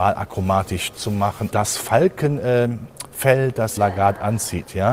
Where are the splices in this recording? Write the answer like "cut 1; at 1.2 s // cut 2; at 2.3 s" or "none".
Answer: cut 1; at 0.9 s // cut 2; at 1.5 s // cut 3; at 3.8 s